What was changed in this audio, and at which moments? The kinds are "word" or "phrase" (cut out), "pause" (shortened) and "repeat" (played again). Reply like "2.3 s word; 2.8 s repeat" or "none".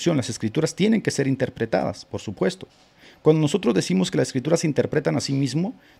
none

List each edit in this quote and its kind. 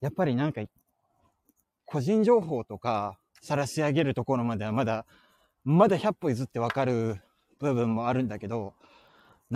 3.3 s pause

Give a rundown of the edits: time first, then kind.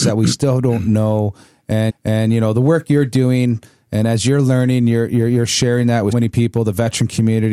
1.9 s repeat; 6.1 s word

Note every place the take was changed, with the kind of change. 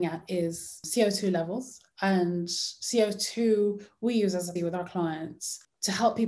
4.6 s word

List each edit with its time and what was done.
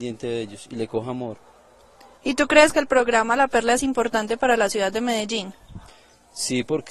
none

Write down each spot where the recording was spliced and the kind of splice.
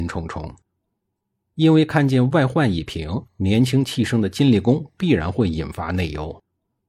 3.3 s pause

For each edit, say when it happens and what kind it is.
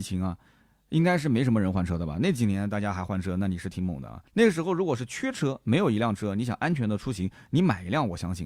4.3 s pause

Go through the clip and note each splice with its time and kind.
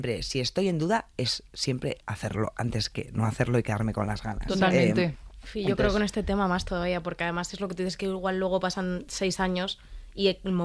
2.0 s pause

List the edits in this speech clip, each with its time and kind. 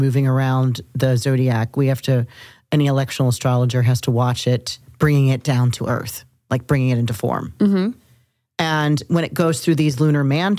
none

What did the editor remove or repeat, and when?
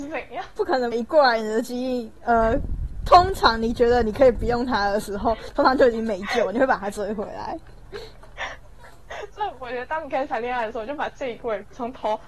0.9 s phrase

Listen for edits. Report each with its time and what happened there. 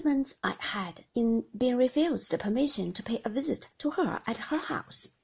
1.1 s pause; 3.7 s pause

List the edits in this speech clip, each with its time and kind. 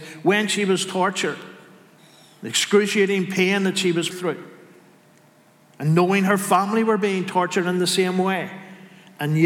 4.1 s word

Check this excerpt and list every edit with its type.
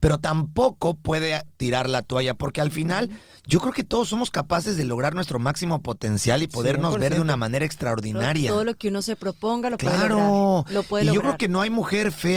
none

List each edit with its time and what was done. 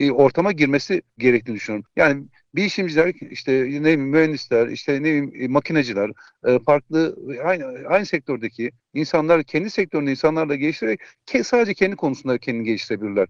none

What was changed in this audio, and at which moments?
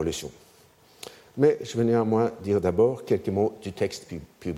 none

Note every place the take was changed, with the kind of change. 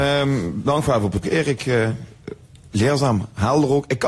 1.2 s word

